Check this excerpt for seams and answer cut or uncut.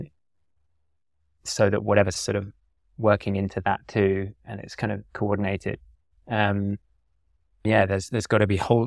cut